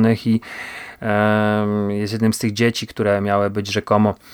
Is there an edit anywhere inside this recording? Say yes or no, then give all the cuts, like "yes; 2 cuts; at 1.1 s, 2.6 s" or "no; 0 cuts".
no; 0 cuts